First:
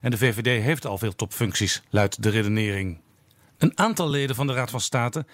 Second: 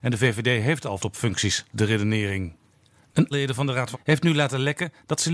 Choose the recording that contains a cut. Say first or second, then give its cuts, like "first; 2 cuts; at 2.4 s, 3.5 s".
second; 4 cuts; at 1.0 s, 1.7 s, 3.3 s, 3.9 s